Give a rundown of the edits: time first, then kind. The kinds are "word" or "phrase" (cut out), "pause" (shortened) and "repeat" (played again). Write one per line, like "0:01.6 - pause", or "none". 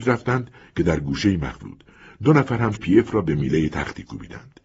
0:01.6 - word
0:02.8 - word